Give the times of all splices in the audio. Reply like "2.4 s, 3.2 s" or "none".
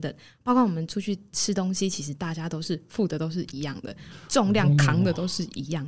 none